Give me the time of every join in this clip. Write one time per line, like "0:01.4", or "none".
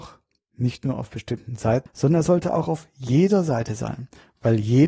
0:01.9

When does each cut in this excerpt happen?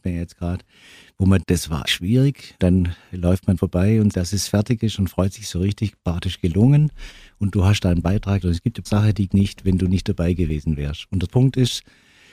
0:01.4
0:01.8
0:02.6
0:03.6
0:04.1
0:08.4
0:08.9
0:09.3
0:11.3

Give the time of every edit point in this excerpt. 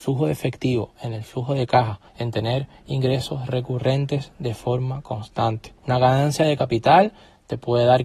0:02.1
0:05.8

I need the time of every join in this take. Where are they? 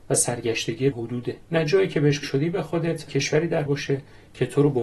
0:00.9
0:01.4
0:02.2
0:03.1
0:03.7

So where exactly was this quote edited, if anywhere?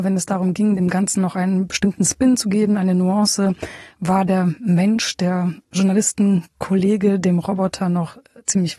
0:05.6

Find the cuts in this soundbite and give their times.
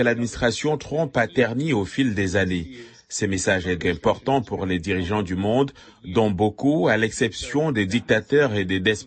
0:03.8

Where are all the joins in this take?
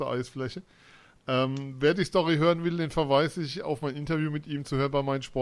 none

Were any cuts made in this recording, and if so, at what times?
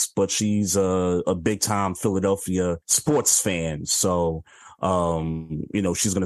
0:02.8

